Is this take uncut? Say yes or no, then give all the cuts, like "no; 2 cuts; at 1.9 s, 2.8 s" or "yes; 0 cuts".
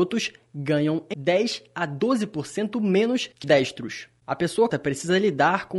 no; 3 cuts; at 1.1 s, 3.4 s, 4.7 s